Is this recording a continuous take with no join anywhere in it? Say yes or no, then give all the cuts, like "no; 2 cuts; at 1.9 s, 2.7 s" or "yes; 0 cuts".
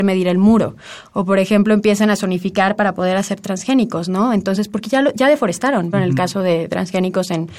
no; 1 cut; at 5.9 s